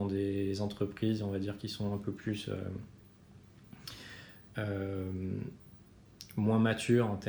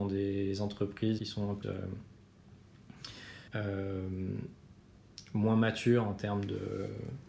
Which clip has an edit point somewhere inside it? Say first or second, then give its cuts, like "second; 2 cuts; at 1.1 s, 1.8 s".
second; 3 cuts; at 1.2 s, 1.6 s, 3.5 s